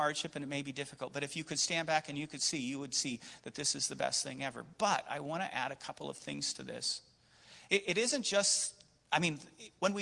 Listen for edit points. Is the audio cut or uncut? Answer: uncut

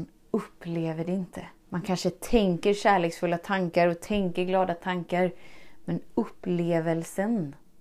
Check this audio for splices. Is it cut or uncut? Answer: cut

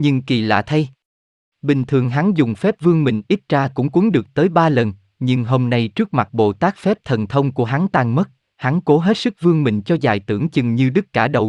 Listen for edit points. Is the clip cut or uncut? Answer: uncut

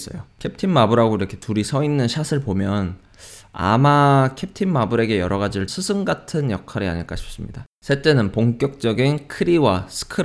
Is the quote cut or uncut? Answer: cut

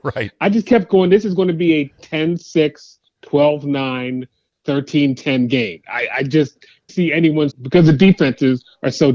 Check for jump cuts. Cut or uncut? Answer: cut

